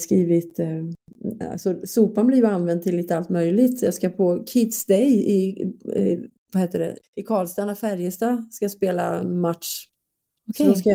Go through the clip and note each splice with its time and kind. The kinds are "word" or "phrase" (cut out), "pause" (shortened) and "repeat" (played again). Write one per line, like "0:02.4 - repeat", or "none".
0:07.0 - pause